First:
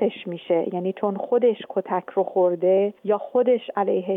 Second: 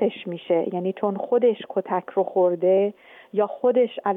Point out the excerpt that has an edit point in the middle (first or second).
first